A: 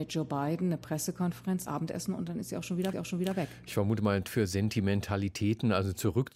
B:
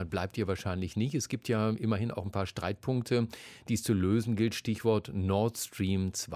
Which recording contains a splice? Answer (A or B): A